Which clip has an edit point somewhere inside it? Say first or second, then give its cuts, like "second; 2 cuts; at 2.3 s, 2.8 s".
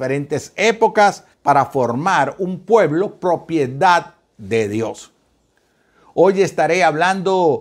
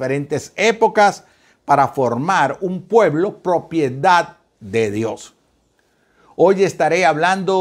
first; 1 cut; at 1.3 s